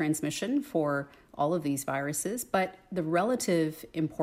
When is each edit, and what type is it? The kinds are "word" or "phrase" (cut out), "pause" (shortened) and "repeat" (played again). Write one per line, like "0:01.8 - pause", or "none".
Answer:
none